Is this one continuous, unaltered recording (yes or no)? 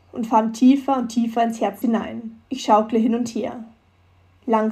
no